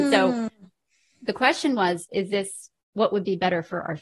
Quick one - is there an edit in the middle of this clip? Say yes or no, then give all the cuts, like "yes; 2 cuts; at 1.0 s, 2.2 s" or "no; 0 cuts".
yes; 1 cut; at 2.8 s